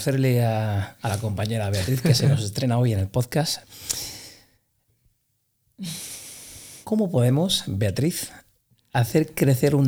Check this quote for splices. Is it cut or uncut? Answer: uncut